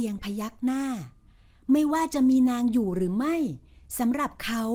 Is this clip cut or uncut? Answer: uncut